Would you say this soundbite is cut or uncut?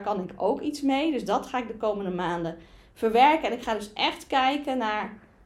uncut